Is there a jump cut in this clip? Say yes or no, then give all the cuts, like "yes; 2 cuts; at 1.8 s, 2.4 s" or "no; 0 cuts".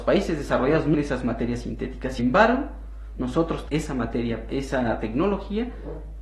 yes; 4 cuts; at 0.9 s, 2.2 s, 3.7 s, 4.5 s